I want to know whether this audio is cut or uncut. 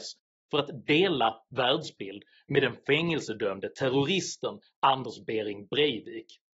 uncut